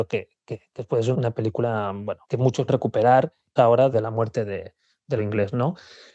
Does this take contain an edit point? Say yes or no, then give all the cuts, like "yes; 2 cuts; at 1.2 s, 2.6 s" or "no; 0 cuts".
yes; 6 cuts; at 1.1 s, 2.2 s, 2.7 s, 3.6 s, 3.9 s, 5.2 s